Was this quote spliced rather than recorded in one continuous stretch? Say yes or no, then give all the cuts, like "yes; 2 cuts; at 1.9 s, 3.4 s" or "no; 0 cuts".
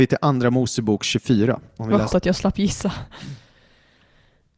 yes; 1 cut; at 2.1 s